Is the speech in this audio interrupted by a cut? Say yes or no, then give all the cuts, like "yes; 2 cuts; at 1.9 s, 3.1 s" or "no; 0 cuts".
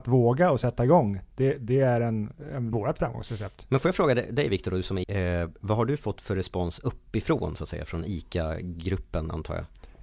yes; 2 cuts; at 2.7 s, 5.0 s